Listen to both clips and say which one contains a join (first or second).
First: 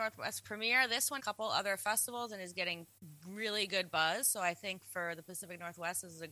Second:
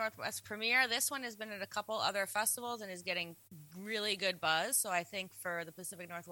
first